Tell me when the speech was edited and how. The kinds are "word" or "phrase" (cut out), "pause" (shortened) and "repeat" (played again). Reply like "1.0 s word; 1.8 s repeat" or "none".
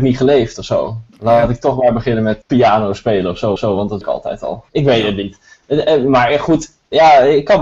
1.1 s pause; 2.4 s word; 3.6 s repeat; 4.0 s word; 4.7 s pause